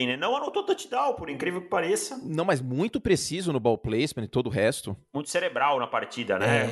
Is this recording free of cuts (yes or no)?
yes